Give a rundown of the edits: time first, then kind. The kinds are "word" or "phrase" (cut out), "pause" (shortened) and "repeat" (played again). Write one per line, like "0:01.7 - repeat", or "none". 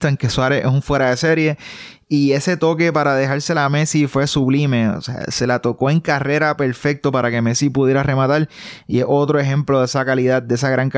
none

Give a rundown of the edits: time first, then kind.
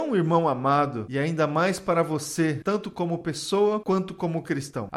none

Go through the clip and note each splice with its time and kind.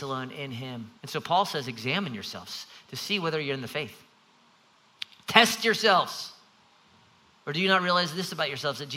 0:01.0 - pause

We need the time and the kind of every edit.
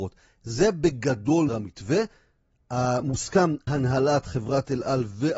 0:01.5 - word
0:03.7 - word

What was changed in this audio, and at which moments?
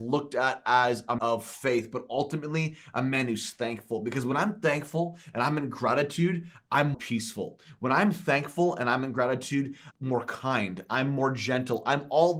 0:01.2 - word
0:06.9 - word
0:09.9 - word

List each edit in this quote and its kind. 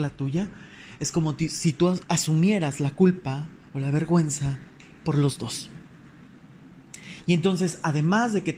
0:03.7 - pause

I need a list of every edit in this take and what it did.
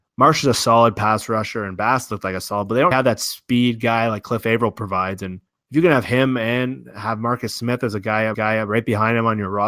0:02.9 - word
0:05.5 - pause
0:08.3 - repeat

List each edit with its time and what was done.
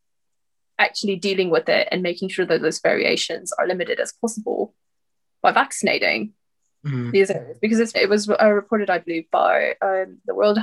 0:07.9 - word

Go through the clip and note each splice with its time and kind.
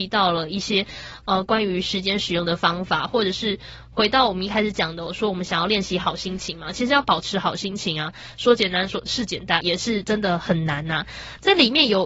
0:09.6 - phrase

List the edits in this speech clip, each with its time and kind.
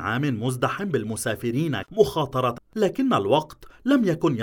0:01.8 - word
0:02.6 - word

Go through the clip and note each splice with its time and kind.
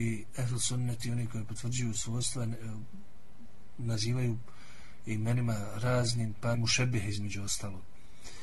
0:06.5 - word

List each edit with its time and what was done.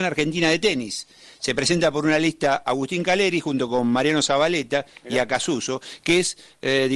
none

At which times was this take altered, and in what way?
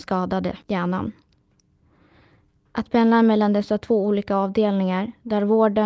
none

